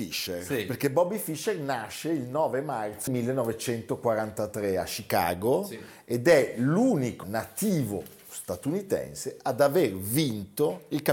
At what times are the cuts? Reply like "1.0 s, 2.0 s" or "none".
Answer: 3.1 s, 7.2 s